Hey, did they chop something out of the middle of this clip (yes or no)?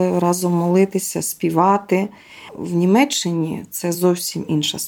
no